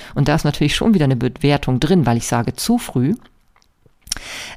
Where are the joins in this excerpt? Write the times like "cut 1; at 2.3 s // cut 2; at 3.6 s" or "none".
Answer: none

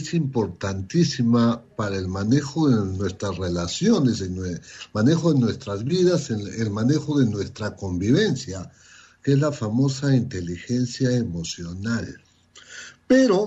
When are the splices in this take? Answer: none

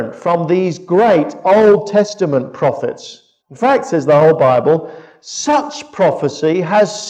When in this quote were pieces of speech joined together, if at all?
cut 1; at 3.4 s

